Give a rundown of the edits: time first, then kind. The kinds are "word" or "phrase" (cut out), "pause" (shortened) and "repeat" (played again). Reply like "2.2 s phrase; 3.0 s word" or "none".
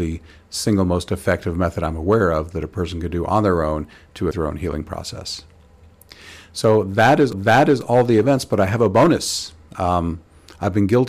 4.3 s word; 7.3 s repeat